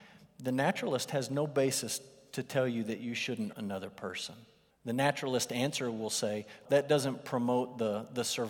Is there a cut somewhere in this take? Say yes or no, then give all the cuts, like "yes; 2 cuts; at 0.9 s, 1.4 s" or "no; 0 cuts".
yes; 3 cuts; at 3.5 s, 4.7 s, 6.6 s